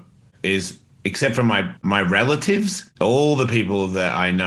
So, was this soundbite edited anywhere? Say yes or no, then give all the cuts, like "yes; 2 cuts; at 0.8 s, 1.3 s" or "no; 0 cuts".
yes; 2 cuts; at 1.8 s, 2.9 s